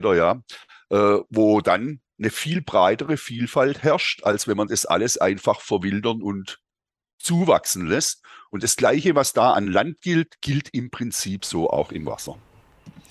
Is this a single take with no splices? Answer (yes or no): yes